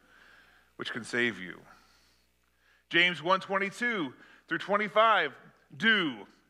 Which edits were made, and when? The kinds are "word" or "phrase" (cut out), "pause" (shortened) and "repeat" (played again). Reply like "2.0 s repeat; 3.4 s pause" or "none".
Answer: none